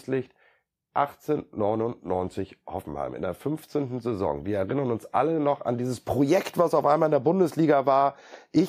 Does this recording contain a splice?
no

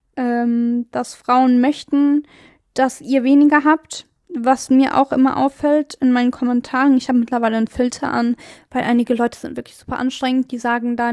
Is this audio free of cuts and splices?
yes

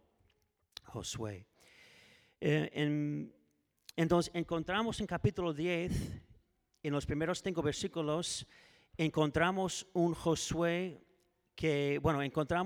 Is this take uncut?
yes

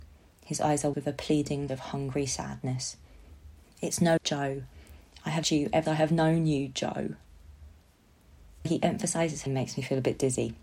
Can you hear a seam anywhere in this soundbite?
yes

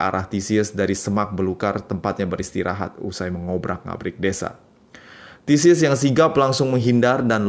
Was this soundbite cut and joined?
no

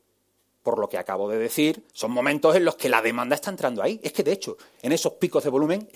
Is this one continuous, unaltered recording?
no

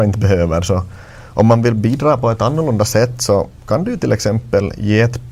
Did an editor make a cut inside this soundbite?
no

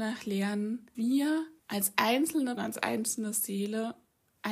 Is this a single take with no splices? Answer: no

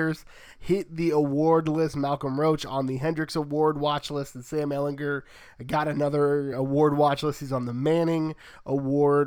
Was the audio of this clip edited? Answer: no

